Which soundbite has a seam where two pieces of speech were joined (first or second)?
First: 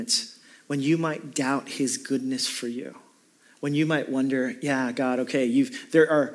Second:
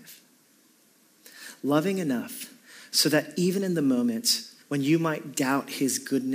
second